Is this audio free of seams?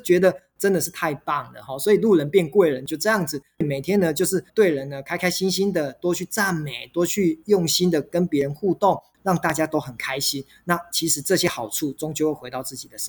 no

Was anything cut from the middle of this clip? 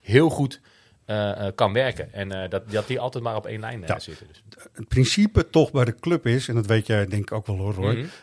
no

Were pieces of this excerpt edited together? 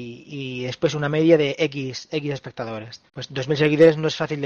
yes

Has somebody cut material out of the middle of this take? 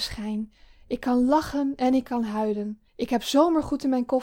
yes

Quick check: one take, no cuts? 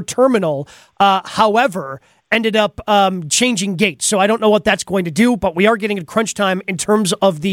yes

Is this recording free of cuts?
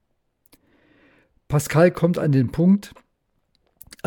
yes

